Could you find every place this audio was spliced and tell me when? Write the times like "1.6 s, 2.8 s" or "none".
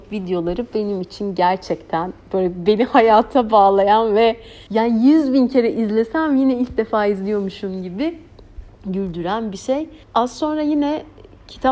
4.7 s, 10.0 s